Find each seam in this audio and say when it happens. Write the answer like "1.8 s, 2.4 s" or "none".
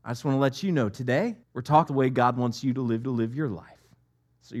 1.4 s, 1.9 s, 3.0 s